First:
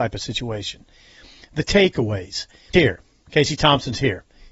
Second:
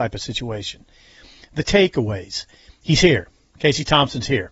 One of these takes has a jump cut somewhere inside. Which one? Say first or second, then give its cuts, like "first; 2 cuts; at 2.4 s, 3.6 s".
first; 1 cut; at 2.7 s